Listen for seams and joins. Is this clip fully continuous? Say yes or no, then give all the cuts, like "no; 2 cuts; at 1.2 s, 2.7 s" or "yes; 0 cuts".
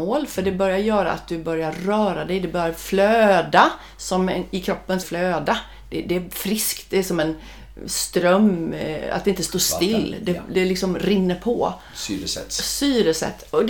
no; 1 cut; at 5.0 s